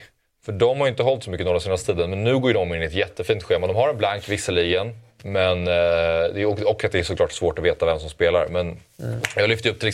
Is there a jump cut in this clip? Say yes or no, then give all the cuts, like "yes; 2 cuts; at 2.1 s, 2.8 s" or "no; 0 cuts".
no; 0 cuts